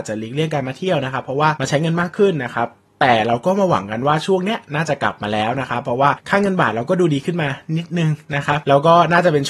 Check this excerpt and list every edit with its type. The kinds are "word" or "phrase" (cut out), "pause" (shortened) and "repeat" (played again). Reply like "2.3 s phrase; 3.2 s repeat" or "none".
none